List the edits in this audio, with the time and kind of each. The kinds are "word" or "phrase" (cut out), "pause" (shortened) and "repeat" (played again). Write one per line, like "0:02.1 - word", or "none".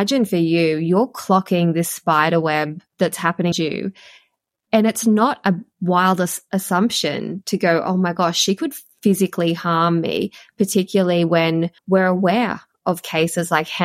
0:02.9 - pause
0:03.5 - word
0:11.8 - pause